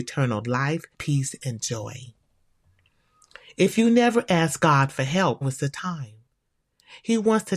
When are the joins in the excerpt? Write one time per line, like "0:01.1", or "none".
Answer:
0:00.9
0:05.4